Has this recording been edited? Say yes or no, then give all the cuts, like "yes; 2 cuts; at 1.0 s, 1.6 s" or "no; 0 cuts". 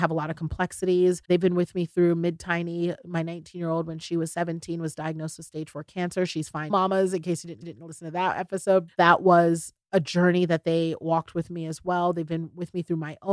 yes; 5 cuts; at 1.2 s, 6.7 s, 7.6 s, 8.9 s, 9.8 s